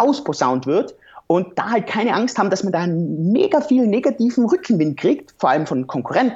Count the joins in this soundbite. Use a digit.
0